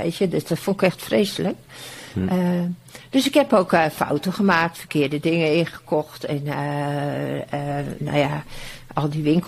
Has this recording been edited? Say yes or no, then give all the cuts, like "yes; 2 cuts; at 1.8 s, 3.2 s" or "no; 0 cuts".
no; 0 cuts